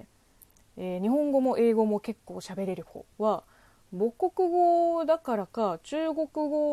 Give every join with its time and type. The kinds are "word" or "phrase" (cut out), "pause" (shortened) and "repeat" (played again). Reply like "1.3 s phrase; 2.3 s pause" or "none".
3.1 s pause

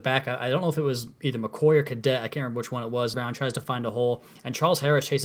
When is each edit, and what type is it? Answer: 3.1 s word

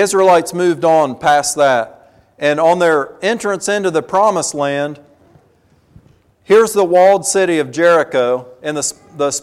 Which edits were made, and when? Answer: none

